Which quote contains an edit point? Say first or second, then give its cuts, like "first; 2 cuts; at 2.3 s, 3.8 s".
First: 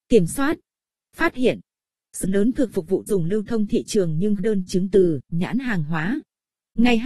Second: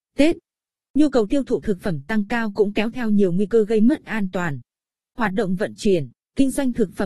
first; 5 cuts; at 2.2 s, 2.7 s, 3.1 s, 4.4 s, 5.3 s